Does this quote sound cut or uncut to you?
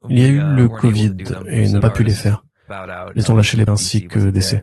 cut